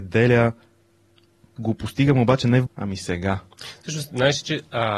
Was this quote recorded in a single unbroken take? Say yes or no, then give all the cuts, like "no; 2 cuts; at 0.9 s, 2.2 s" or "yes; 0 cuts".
no; 2 cuts; at 1.6 s, 2.7 s